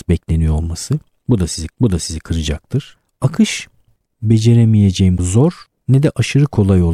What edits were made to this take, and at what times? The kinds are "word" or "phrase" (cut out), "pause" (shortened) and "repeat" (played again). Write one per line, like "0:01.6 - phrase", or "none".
0:01.7 - repeat
0:04.1 - word
0:05.2 - word